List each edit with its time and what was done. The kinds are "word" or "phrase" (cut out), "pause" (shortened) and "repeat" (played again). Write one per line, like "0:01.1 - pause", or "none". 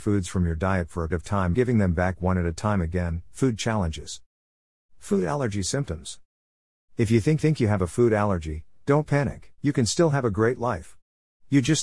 0:01.1 - word
0:01.5 - word
0:07.4 - repeat
0:09.6 - pause